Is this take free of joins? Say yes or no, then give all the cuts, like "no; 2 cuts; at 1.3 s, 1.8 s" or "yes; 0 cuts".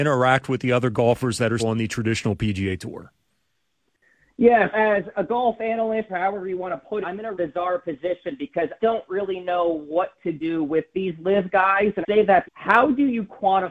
no; 8 cuts; at 1.6 s, 4.7 s, 6.1 s, 7.0 s, 7.3 s, 8.8 s, 12.0 s, 12.4 s